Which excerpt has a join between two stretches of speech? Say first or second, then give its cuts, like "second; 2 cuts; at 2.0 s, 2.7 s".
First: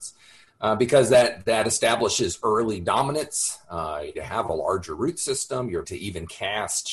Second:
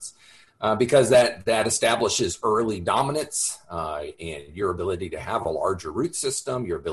first; 2 cuts; at 4.1 s, 5.8 s